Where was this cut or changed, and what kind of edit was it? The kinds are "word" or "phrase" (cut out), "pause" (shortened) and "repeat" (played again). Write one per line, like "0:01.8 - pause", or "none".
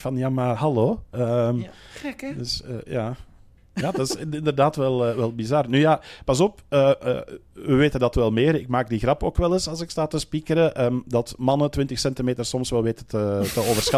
none

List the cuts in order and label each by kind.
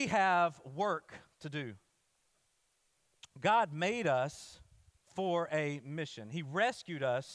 0:05.0 - pause

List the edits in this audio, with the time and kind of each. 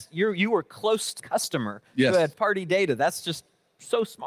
0:01.2 - word
0:02.3 - word

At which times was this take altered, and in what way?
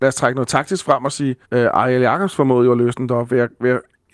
0:01.4 - pause

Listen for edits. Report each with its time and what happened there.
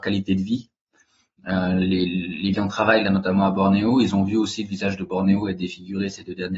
0:02.5 - phrase

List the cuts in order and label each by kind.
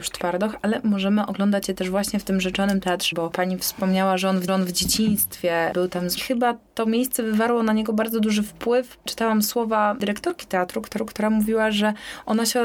0:03.1 - word
0:04.5 - repeat
0:06.2 - phrase
0:11.0 - repeat

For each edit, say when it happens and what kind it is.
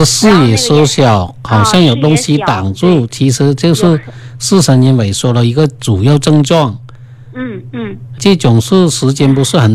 0:08.2 - word

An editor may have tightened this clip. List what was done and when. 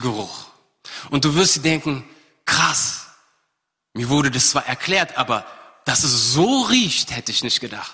none

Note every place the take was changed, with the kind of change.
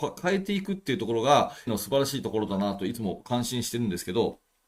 0:01.7 - word

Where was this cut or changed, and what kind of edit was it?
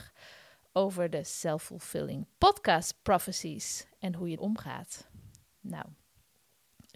0:02.3 - pause
0:04.4 - word

